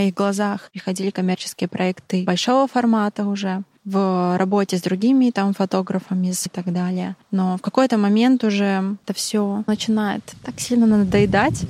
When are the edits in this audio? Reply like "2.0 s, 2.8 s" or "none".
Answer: 6.5 s